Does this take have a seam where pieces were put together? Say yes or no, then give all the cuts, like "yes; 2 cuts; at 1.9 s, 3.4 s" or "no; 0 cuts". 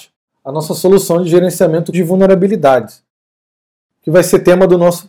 yes; 1 cut; at 1.9 s